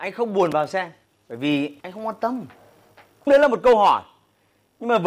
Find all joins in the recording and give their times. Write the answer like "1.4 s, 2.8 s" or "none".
1.0 s, 1.8 s, 3.3 s